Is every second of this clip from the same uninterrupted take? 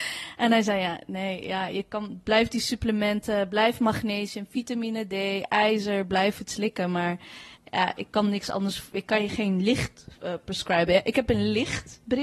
no; 2 cuts; at 7.5 s, 10.2 s

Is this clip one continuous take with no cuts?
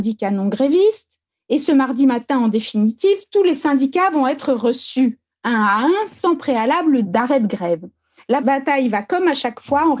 yes; 0 cuts

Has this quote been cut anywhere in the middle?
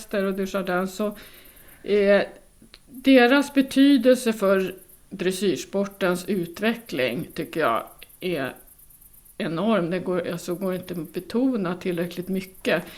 no; 0 cuts

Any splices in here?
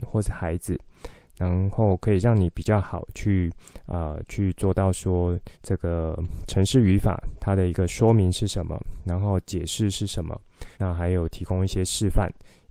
yes; 2 cuts; at 5.5 s, 10.7 s

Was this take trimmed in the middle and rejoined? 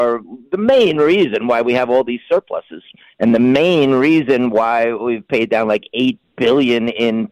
no; 0 cuts

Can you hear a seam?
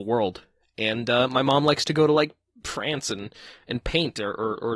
no; 0 cuts

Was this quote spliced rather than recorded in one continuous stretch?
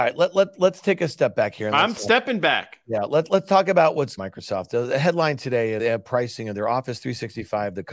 yes; 2 cuts; at 4.2 s, 5.8 s

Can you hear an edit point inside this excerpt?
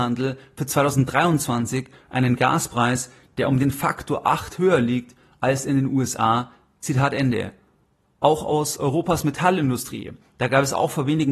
no; 0 cuts

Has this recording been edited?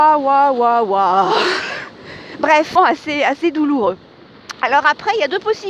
yes; 1 cut; at 2.8 s

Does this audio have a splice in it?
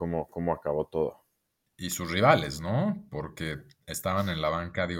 no; 0 cuts

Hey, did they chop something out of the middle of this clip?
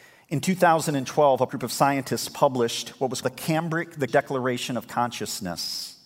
yes; 3 cuts; at 1.5 s, 3.2 s, 4.1 s

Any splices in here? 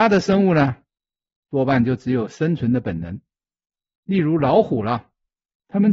no; 0 cuts

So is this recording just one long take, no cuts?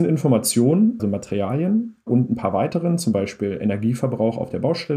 no; 1 cut; at 1.0 s

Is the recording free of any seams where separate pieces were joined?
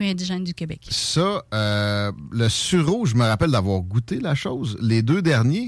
yes; 0 cuts

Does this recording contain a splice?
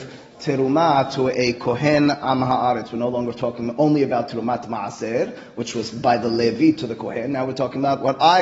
no; 0 cuts

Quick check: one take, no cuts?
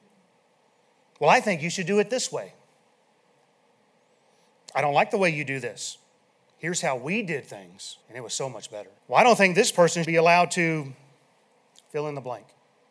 no; 4 cuts; at 6.2 s, 8.0 s, 9.0 s, 10.0 s

